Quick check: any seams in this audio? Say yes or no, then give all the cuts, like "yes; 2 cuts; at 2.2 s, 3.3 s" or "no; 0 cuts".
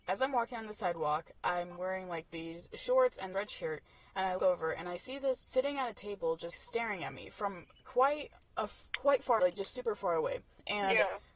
yes; 6 cuts; at 3.3 s, 4.4 s, 5.4 s, 6.5 s, 8.9 s, 9.4 s